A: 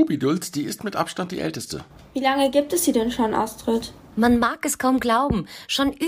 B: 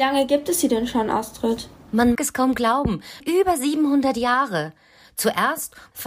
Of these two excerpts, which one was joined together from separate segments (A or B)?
B